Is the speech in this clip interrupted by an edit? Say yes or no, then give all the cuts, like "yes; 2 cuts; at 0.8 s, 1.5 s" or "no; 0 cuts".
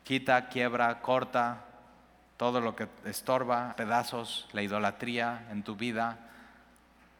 yes; 1 cut; at 3.7 s